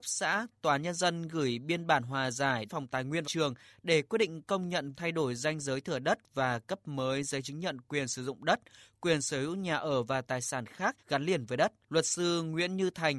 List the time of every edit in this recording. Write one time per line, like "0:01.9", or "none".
0:02.7
0:03.2
0:04.9
0:11.0
0:11.8